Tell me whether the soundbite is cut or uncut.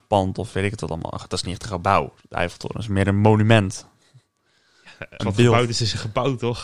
cut